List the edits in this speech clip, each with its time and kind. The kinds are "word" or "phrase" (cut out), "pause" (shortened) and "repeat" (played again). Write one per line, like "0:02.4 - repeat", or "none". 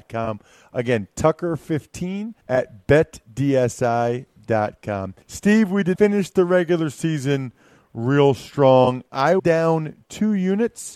0:02.4 - pause
0:05.2 - pause
0:05.9 - word
0:09.4 - word